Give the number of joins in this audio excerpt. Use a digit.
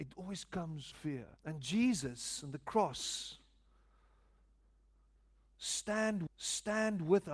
3